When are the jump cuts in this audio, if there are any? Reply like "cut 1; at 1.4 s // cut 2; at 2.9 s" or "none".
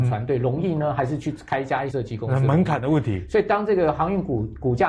cut 1; at 1.9 s